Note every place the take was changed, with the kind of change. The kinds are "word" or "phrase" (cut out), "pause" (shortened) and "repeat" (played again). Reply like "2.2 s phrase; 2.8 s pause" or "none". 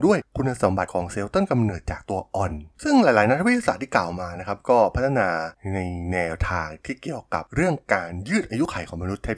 2.7 s pause